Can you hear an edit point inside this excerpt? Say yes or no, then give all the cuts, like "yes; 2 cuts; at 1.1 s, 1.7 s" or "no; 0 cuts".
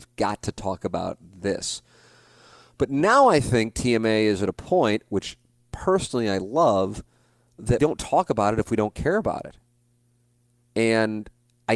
yes; 1 cut; at 7.8 s